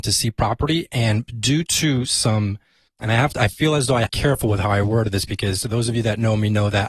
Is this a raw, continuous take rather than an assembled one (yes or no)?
no